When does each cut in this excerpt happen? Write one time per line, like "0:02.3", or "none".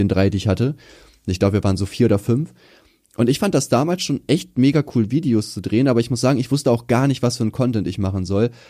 none